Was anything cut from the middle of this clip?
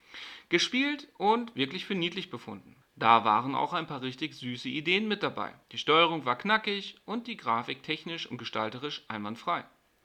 yes; 2 cuts; at 2.8 s, 5.6 s

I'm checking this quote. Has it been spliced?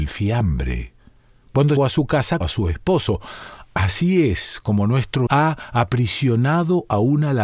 yes; 3 cuts; at 1.8 s, 2.4 s, 5.3 s

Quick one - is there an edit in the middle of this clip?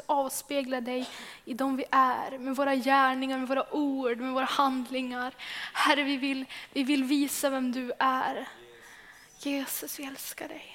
no; 0 cuts

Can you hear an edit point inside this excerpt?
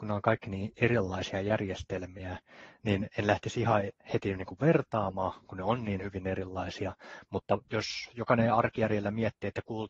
yes; 1 cut; at 7.6 s

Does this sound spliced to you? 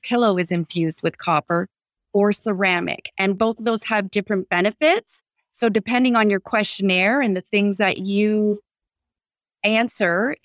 no; 0 cuts

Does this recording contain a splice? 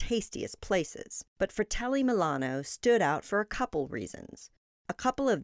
yes; 1 cut; at 1.3 s

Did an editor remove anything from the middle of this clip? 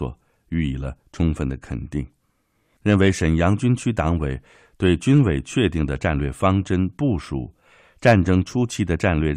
no; 0 cuts

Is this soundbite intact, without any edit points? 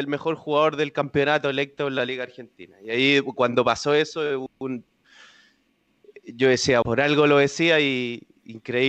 no; 1 cut; at 6.8 s

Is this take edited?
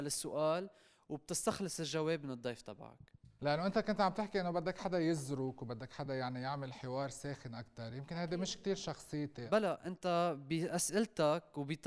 no; 0 cuts

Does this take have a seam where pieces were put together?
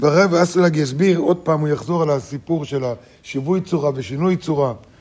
no; 0 cuts

